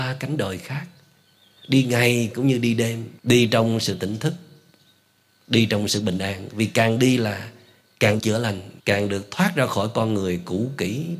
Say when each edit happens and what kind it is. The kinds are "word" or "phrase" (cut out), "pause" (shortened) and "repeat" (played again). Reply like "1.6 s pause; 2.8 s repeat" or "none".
3.2 s pause; 8.2 s word; 8.8 s pause